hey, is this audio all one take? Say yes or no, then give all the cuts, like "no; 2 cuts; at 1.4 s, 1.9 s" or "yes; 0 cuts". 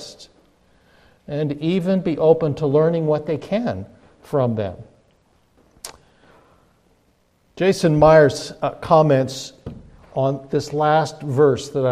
yes; 0 cuts